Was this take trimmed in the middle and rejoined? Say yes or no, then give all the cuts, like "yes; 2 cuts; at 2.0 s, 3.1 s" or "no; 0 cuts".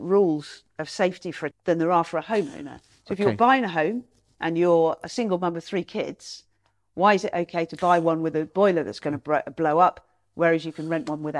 yes; 1 cut; at 1.5 s